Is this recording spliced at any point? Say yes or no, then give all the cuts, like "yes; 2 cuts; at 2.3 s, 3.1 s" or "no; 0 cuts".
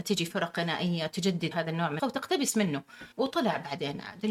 yes; 3 cuts; at 1.5 s, 2.0 s, 3.1 s